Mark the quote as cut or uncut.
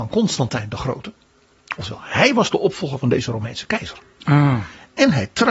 uncut